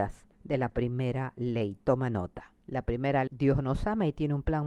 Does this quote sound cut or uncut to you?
cut